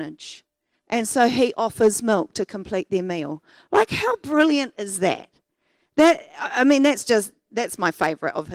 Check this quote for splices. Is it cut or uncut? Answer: uncut